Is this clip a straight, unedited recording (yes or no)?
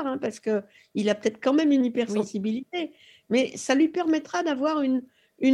yes